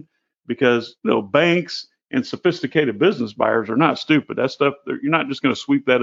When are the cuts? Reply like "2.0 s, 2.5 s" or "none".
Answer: none